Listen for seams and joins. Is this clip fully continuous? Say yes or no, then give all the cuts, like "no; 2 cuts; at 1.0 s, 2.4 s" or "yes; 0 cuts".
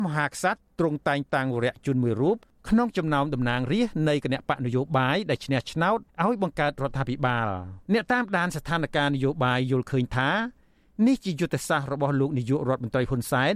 no; 2 cuts; at 6.1 s, 7.8 s